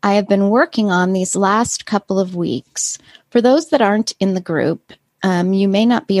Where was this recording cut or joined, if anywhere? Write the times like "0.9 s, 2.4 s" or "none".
none